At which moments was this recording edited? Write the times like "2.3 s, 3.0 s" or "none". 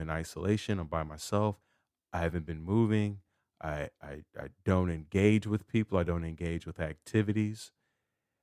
none